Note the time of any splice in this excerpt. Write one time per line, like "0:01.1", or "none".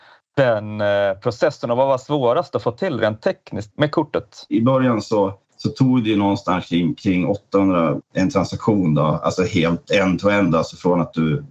0:03.7
0:05.4
0:08.0

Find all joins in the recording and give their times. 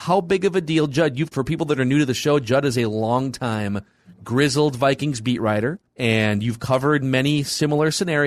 0:01.3
0:05.9

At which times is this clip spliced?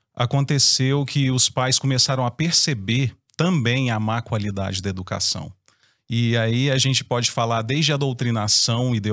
0:03.2

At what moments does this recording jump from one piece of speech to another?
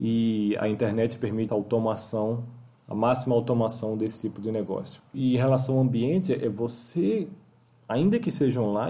0:01.5

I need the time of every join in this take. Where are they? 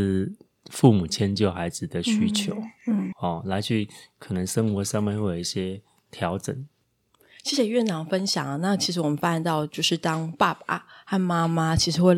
0:03.1

